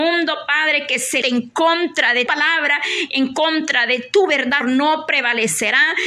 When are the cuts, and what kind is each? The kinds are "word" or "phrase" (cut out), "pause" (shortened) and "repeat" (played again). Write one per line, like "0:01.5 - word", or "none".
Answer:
0:01.2 - word
0:02.3 - word
0:04.6 - word